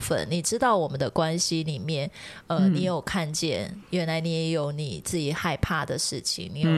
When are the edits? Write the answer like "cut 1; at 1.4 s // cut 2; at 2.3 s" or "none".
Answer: none